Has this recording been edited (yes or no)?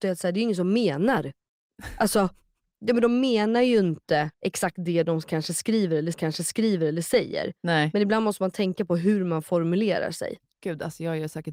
yes